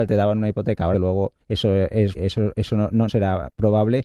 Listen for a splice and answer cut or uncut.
cut